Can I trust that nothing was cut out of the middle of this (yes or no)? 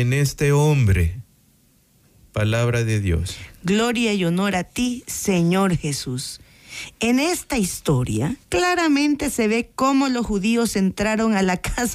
no